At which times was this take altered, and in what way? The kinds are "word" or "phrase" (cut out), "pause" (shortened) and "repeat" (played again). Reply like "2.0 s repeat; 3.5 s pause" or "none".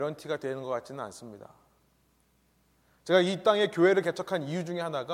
none